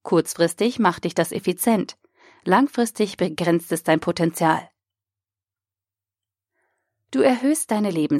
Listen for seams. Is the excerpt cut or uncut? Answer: uncut